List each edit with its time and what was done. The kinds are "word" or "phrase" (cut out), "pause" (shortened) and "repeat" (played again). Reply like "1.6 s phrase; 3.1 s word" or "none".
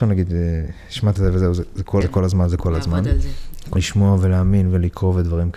1.2 s word; 2.0 s word; 3.8 s word